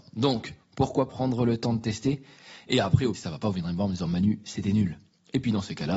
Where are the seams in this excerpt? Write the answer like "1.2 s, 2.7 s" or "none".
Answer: 1.1 s, 3.1 s